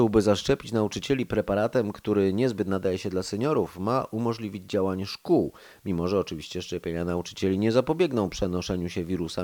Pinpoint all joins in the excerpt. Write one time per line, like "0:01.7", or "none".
none

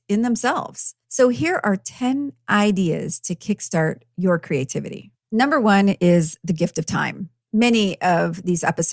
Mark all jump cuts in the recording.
0:01.0
0:05.2
0:07.4

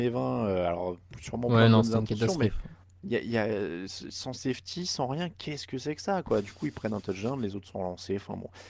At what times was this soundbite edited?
0:02.8

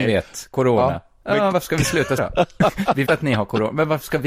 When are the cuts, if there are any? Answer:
0:01.5
0:02.2
0:03.1

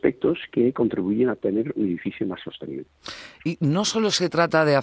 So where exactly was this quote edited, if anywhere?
none

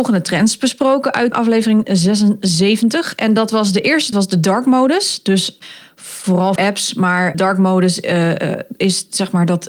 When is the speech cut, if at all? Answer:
0:01.3
0:04.1
0:06.6
0:07.3

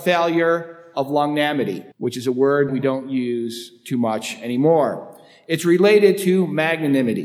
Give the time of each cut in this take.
0:01.9
0:02.7

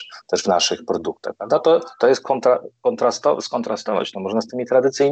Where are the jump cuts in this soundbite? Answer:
none

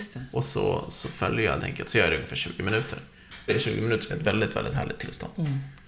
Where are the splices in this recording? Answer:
0:01.6
0:03.5
0:04.1

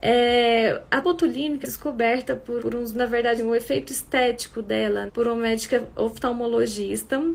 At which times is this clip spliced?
0:01.0
0:01.6
0:02.6
0:02.9
0:03.4
0:05.1

